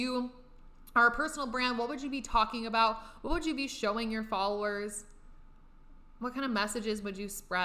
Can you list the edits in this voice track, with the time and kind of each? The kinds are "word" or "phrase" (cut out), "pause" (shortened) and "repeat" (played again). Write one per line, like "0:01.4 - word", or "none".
none